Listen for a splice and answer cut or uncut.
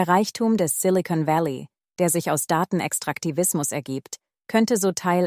uncut